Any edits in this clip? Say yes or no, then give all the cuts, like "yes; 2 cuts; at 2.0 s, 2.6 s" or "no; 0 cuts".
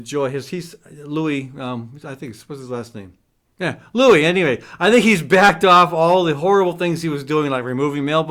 no; 0 cuts